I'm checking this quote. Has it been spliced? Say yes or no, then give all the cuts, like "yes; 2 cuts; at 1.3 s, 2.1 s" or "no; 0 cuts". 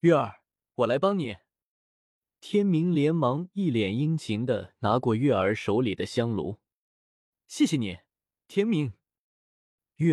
no; 0 cuts